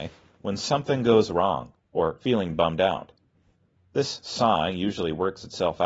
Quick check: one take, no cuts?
no; 1 cut; at 2.2 s

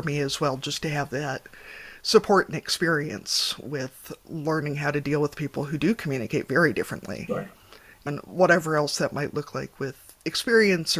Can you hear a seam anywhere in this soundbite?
yes; 1 cut; at 8.1 s

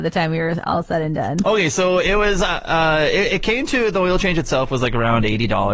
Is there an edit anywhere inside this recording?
no; 0 cuts

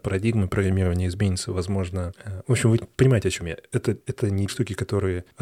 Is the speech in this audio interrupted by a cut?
yes; 1 cut; at 4.5 s

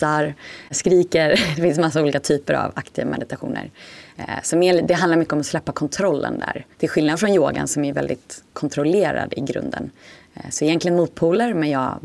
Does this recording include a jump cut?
yes; 1 cut; at 6.7 s

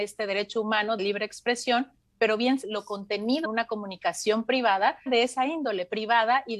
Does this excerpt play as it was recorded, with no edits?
no; 4 cuts; at 1.0 s, 2.6 s, 3.4 s, 5.1 s

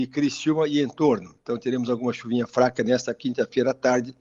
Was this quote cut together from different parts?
no; 0 cuts

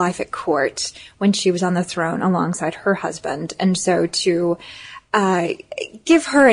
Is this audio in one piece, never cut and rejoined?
yes; 0 cuts

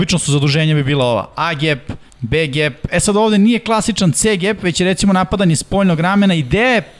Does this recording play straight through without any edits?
no; 1 cut; at 2.1 s

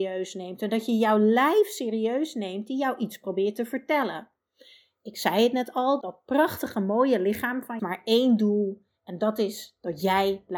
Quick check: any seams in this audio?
yes; 2 cuts; at 6.0 s, 7.8 s

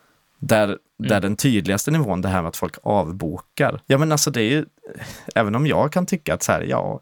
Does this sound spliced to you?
yes; 1 cut; at 3.8 s

